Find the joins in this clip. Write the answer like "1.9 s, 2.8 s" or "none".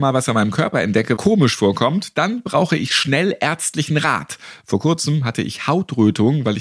1.2 s